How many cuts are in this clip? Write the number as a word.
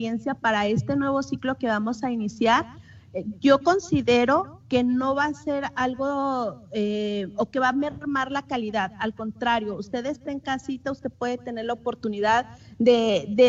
zero